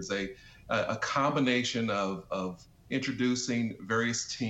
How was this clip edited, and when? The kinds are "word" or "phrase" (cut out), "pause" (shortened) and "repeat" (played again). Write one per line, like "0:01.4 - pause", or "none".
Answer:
none